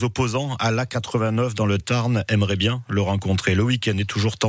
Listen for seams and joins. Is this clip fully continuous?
yes; 0 cuts

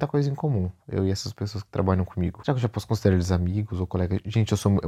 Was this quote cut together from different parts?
no; 0 cuts

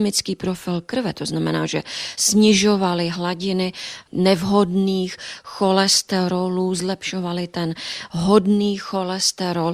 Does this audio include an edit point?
no; 0 cuts

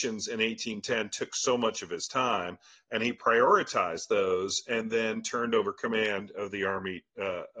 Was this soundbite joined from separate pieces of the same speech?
no; 0 cuts

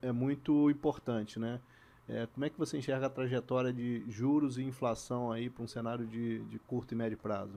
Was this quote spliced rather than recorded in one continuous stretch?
no; 0 cuts

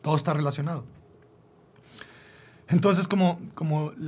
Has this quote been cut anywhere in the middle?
no; 0 cuts

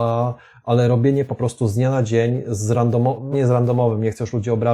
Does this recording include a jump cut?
yes; 1 cut; at 3.3 s

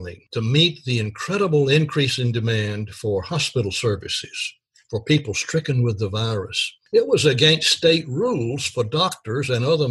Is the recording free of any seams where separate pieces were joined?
yes; 0 cuts

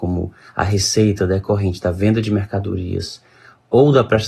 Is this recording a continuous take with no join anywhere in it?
yes; 0 cuts

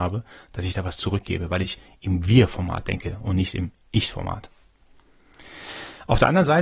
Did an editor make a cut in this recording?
no; 0 cuts

